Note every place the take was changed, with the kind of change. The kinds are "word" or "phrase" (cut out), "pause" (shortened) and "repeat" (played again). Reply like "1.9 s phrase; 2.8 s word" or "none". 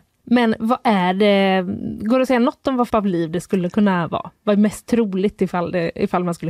2.9 s phrase